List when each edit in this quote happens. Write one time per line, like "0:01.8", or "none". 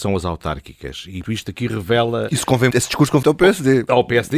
0:01.2
0:02.7
0:03.2